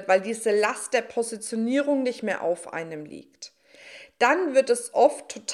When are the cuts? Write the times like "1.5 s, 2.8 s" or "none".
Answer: none